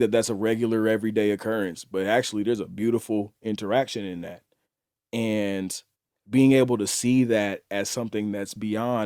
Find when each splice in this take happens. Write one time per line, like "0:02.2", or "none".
none